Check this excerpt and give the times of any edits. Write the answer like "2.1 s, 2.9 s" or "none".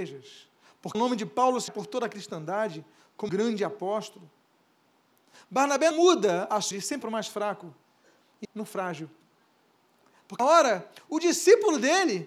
0.9 s, 1.7 s, 3.3 s, 5.9 s, 6.7 s, 7.0 s, 8.4 s, 10.4 s